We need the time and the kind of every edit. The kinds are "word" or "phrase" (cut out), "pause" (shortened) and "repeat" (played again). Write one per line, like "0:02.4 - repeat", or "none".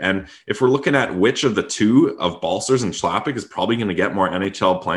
none

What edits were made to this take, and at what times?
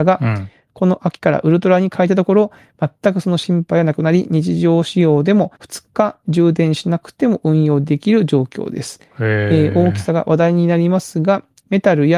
0:05.6 - pause

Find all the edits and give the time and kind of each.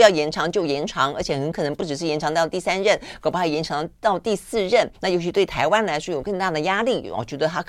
0:04.9 - pause

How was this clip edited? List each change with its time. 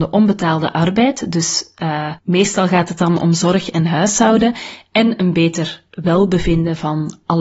0:02.2 - pause

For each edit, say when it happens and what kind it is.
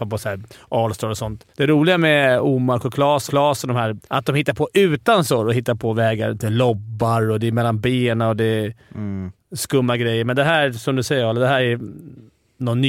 0:01.5 - pause
0:03.3 - repeat
0:04.0 - pause

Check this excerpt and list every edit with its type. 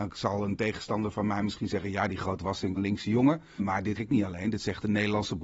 0:02.8 - phrase
0:03.6 - word
0:04.0 - word

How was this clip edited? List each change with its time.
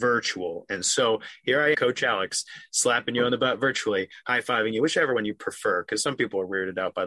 0:01.7 - word

